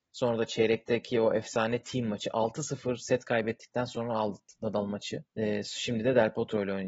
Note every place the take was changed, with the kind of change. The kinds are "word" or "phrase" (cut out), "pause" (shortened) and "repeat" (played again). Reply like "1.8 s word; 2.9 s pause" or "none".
5.3 s pause